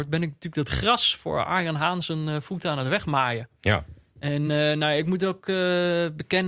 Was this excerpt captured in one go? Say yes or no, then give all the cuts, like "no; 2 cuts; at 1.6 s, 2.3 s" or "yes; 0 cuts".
yes; 0 cuts